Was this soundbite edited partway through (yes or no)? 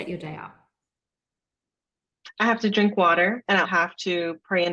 yes